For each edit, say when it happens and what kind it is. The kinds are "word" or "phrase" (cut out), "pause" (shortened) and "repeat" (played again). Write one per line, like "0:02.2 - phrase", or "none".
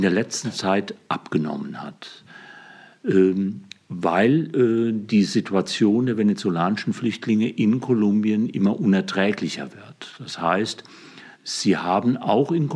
0:11.3 - pause